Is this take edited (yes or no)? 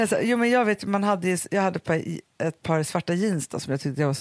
no